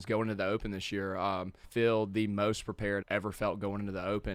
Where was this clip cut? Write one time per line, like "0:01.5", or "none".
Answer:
0:01.6
0:03.0

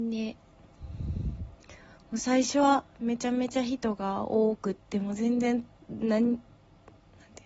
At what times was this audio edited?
none

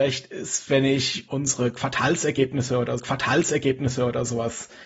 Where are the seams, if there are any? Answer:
0:01.3
0:03.0

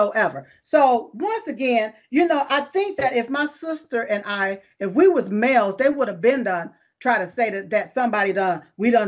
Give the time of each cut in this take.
none

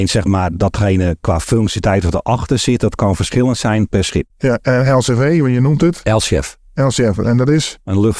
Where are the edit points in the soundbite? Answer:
0:04.3

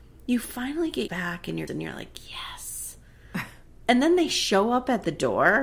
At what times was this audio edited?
0:01.1
0:01.7

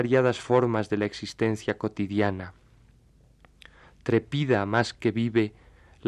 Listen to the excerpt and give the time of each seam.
none

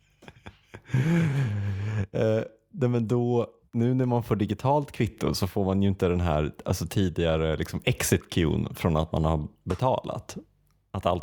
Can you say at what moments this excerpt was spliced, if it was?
0:03.6

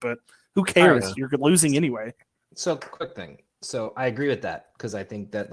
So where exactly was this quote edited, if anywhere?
0:02.8

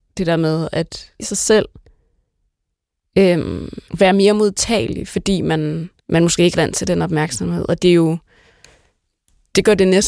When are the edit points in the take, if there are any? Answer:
0:01.2
0:03.9
0:06.0
0:06.5

